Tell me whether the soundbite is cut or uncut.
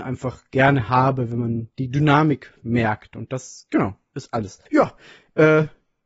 cut